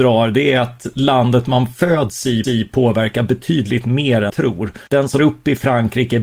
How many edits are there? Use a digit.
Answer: 4